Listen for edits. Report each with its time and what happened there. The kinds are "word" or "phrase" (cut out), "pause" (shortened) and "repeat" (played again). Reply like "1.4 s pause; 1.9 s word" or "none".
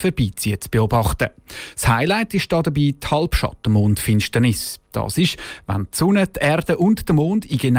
none